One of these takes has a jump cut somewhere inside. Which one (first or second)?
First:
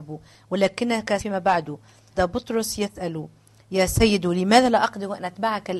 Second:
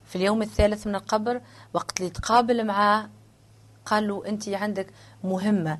first